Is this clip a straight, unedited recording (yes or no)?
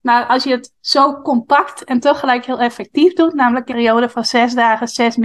no